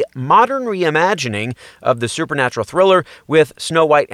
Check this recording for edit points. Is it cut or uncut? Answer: uncut